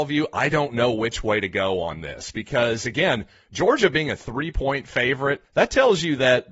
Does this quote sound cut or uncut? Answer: cut